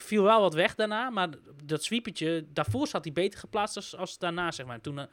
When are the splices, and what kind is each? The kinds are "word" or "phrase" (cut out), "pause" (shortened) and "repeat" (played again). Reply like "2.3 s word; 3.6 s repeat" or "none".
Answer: none